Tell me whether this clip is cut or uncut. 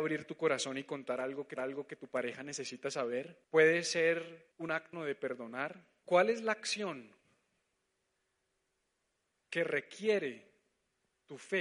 cut